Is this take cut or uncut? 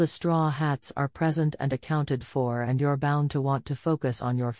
uncut